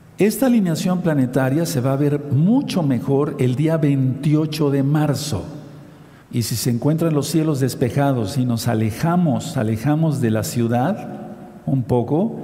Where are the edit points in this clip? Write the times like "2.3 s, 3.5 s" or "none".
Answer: 6.2 s, 9.5 s